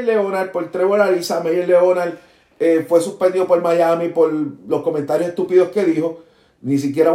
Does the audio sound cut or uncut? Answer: uncut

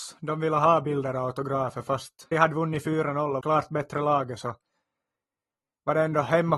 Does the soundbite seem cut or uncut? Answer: cut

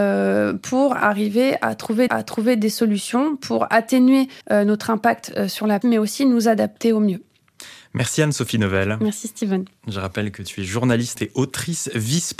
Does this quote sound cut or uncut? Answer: cut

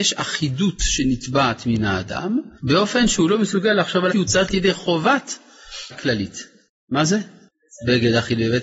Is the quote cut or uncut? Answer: cut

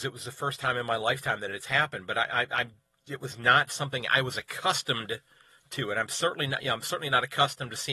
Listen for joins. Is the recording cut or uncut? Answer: uncut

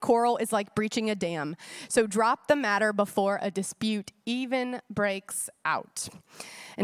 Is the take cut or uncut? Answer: uncut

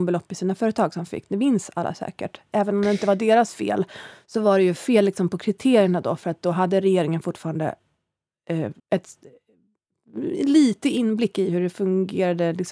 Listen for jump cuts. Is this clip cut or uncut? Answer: cut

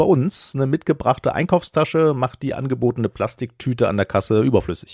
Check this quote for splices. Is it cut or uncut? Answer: uncut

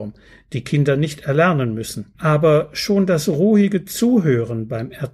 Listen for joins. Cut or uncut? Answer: cut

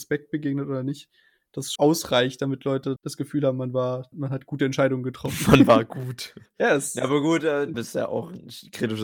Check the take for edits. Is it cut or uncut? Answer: cut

